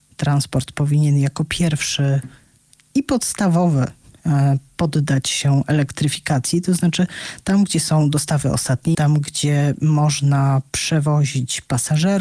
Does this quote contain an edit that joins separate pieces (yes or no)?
yes